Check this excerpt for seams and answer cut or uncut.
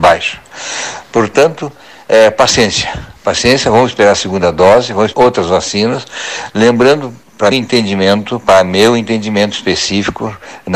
cut